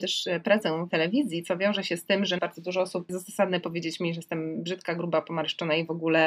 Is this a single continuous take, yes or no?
no